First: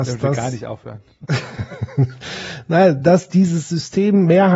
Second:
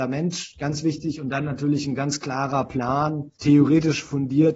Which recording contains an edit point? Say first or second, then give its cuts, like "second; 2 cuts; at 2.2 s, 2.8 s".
second; 1 cut; at 3.4 s